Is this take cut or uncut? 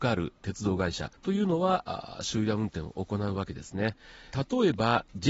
cut